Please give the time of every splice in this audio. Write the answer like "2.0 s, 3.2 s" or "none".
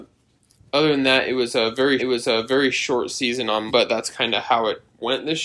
2.0 s, 3.7 s